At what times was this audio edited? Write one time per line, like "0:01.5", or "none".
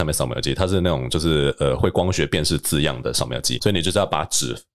0:03.6